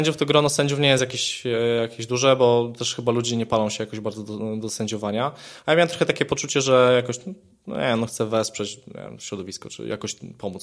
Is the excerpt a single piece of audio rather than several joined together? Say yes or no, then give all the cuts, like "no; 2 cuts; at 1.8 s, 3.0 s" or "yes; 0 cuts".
yes; 0 cuts